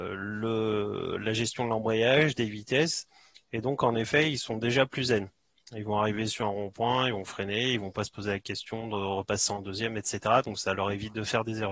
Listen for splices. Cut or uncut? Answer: uncut